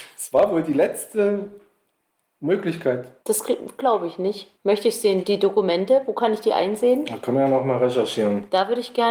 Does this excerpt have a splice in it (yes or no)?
yes